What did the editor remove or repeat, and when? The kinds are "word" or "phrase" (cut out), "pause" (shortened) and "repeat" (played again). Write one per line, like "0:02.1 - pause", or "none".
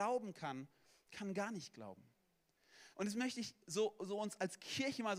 0:02.9 - pause